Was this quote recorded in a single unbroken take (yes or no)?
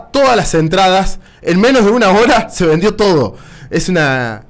yes